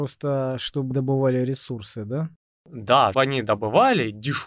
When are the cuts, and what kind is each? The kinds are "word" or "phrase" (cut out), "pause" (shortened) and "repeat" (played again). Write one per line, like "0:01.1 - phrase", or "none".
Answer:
0:00.9 - word
0:03.1 - word